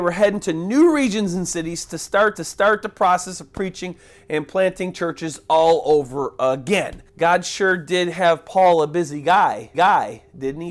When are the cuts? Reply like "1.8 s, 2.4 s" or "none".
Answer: 2.4 s, 7.1 s, 9.7 s